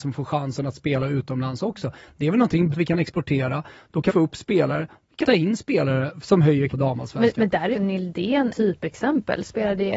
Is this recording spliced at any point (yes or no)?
yes